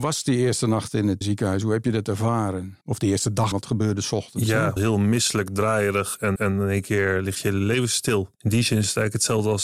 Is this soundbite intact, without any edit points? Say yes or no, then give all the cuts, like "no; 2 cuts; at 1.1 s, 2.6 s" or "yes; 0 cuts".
no; 6 cuts; at 1.2 s, 2.8 s, 3.5 s, 4.8 s, 6.4 s, 8.3 s